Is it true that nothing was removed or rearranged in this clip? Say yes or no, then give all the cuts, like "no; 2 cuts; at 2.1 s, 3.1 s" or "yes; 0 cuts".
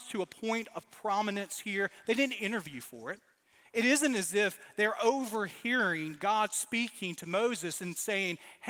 no; 1 cut; at 3.4 s